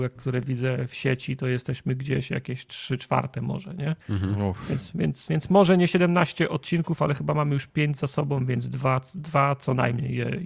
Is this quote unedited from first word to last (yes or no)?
no